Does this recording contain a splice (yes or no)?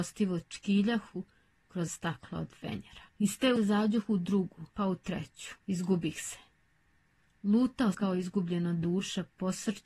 yes